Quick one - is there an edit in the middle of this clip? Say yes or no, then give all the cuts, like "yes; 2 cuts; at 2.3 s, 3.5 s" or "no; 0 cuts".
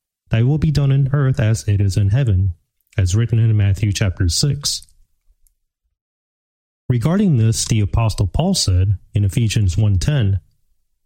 no; 0 cuts